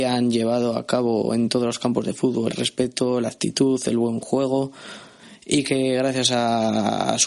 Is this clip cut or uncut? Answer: cut